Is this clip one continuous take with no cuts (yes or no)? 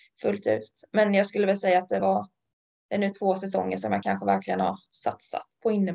yes